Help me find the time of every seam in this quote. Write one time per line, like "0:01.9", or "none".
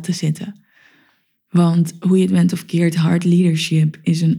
none